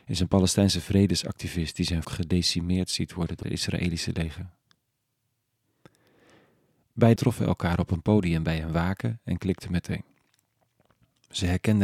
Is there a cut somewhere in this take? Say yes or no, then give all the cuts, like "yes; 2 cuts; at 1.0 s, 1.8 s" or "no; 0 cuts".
yes; 3 cuts; at 2.0 s, 3.4 s, 7.2 s